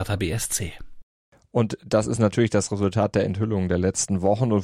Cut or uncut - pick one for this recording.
uncut